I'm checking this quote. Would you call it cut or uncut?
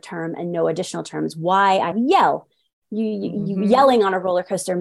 cut